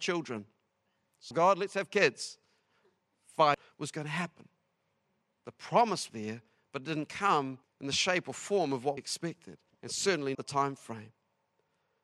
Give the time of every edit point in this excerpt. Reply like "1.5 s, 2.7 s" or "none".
1.3 s, 6.1 s, 7.6 s, 9.0 s, 9.7 s, 10.3 s